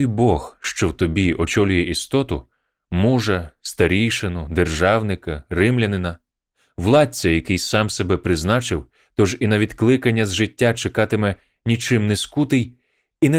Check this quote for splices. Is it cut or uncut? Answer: uncut